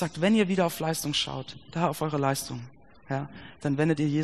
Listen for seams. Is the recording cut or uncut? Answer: uncut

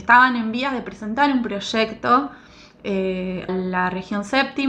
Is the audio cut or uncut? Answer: cut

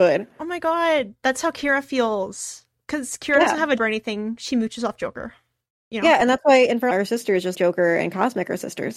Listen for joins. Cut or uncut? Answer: cut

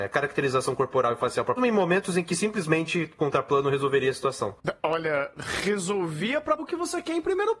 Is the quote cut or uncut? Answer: cut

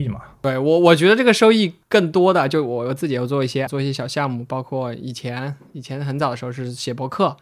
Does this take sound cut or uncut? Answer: cut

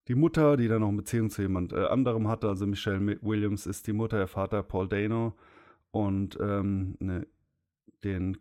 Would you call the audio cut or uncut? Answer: uncut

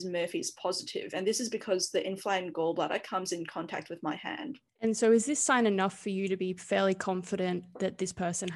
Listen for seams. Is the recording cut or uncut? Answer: cut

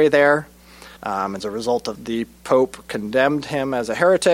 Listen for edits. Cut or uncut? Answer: cut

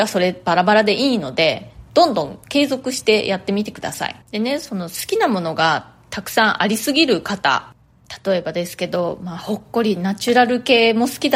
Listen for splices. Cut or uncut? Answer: cut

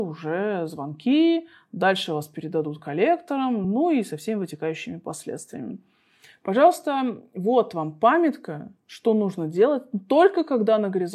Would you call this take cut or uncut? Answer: uncut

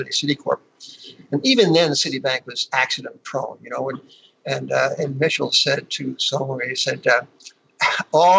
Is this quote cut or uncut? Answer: uncut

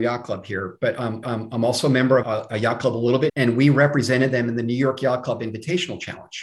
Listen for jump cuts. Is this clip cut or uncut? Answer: cut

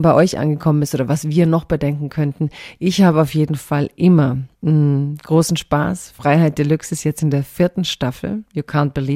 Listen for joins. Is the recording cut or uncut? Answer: cut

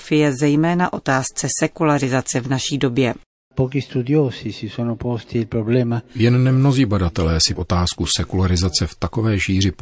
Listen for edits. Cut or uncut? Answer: cut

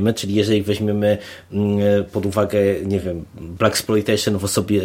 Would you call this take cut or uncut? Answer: uncut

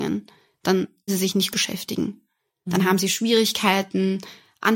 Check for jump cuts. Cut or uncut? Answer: cut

